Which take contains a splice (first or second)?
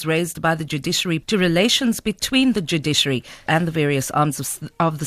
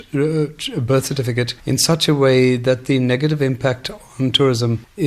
first